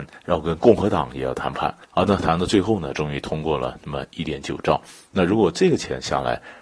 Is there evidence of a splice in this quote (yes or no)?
yes